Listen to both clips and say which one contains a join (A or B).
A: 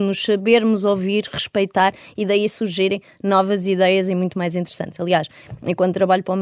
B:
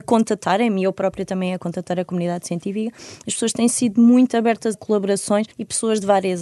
B